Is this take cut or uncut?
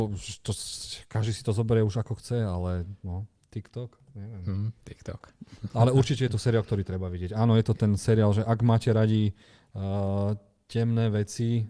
uncut